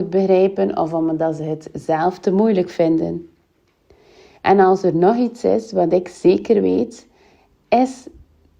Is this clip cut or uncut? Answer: uncut